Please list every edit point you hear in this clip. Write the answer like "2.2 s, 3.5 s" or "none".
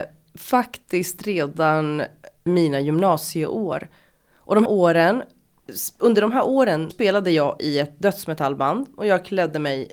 2.5 s, 4.7 s, 6.9 s